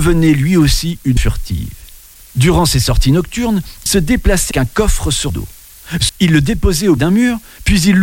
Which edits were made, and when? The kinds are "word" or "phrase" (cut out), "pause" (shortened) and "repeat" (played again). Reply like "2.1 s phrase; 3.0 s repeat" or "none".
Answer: 1.2 s word; 3.9 s word; 4.5 s word; 5.3 s word; 6.1 s word; 7.0 s word